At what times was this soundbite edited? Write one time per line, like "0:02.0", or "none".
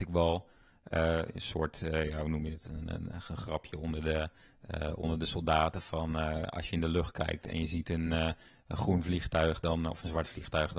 none